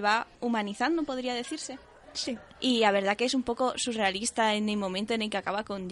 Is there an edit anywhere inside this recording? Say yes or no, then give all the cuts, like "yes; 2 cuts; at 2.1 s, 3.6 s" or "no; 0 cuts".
no; 0 cuts